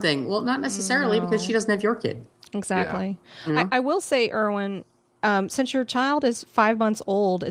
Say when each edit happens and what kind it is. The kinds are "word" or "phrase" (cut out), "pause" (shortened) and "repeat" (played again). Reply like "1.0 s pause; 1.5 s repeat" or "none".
none